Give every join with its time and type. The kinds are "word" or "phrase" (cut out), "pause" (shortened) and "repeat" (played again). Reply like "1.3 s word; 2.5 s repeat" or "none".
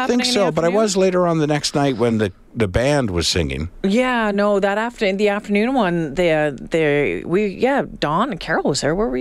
none